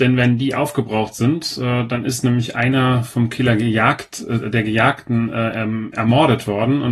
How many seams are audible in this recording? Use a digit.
0